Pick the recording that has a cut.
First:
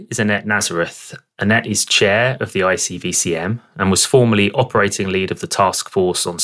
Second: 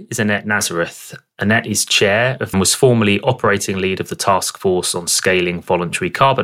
second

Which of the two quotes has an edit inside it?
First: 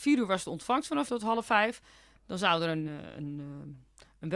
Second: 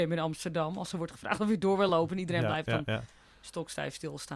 first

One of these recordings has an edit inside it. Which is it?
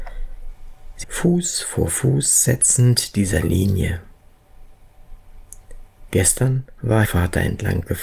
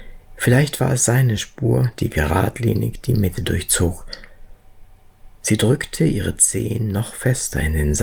first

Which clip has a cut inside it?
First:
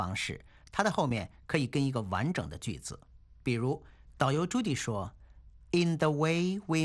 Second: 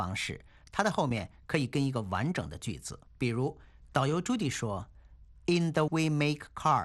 second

